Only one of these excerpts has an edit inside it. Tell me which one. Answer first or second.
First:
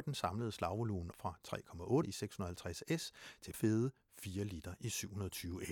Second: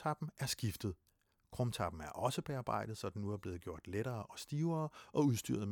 first